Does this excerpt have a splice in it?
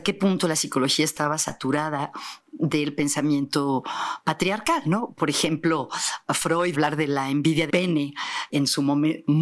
yes; 3 cuts; at 6.7 s, 7.7 s, 8.5 s

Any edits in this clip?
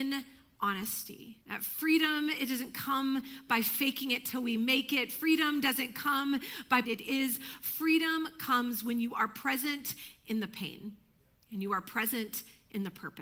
yes; 2 cuts; at 1.4 s, 6.8 s

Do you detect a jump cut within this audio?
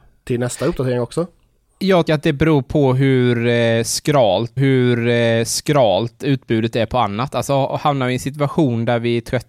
yes; 2 cuts; at 2.1 s, 4.6 s

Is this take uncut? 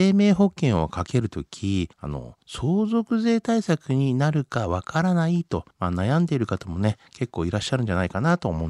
no; 2 cuts; at 1.9 s, 5.7 s

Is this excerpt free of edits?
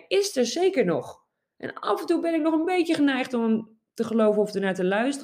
yes; 0 cuts

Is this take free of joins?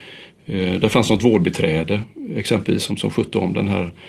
yes; 0 cuts

